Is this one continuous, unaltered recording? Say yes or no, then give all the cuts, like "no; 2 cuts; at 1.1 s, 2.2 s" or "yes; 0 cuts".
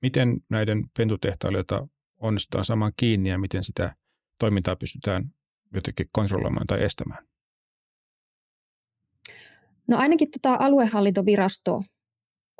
yes; 0 cuts